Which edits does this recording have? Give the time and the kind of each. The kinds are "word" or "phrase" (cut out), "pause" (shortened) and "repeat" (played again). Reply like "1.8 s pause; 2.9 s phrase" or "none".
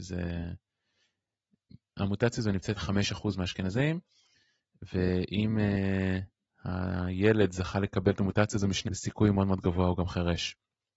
2.8 s word; 8.9 s phrase